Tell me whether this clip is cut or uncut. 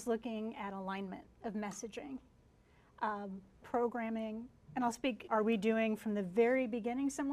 cut